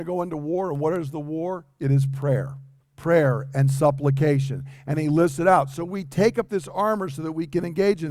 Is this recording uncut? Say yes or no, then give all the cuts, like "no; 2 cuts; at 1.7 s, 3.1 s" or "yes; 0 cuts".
no; 1 cut; at 2.8 s